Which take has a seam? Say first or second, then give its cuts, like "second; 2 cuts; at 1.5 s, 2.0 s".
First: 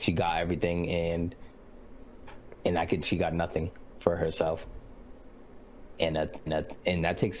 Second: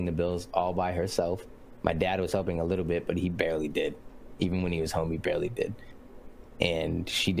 first; 2 cuts; at 3.0 s, 6.5 s